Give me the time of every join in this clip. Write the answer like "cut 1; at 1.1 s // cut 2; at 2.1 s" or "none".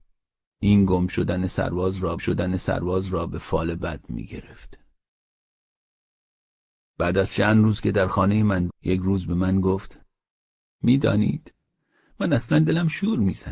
cut 1; at 2.2 s // cut 2; at 8.7 s